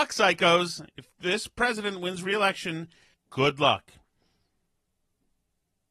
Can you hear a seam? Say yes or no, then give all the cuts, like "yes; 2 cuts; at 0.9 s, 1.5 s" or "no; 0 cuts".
yes; 2 cuts; at 1.1 s, 3.1 s